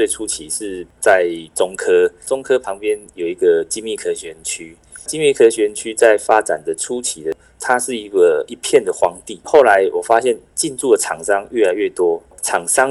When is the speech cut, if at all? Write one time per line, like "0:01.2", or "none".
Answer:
none